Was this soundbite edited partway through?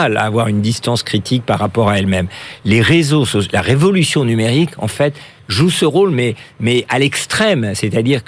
no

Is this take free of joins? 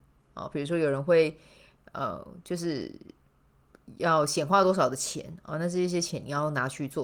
yes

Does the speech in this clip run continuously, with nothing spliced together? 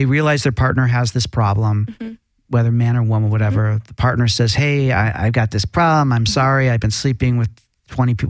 yes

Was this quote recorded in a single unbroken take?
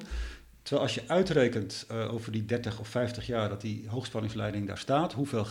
yes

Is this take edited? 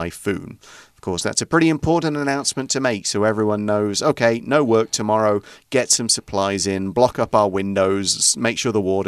no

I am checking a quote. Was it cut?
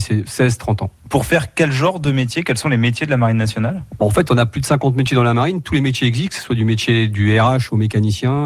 no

